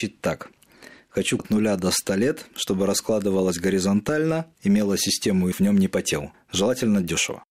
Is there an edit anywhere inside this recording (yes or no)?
yes